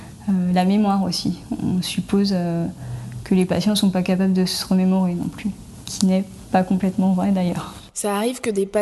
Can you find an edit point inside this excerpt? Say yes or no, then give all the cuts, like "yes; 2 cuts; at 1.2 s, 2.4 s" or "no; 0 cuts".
yes; 1 cut; at 5.8 s